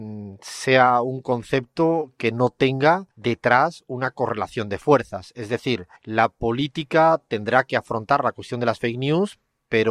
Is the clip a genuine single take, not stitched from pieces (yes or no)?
no